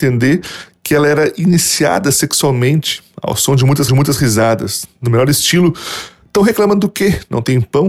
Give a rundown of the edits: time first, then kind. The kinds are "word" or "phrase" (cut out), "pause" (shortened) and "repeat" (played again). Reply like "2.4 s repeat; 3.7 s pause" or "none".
3.9 s repeat